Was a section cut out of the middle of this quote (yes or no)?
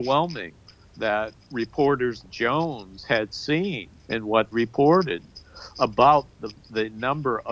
yes